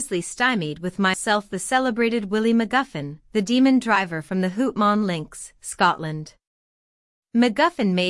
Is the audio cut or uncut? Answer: cut